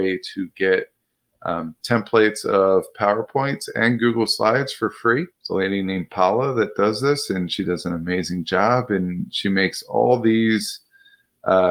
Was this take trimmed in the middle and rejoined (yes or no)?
yes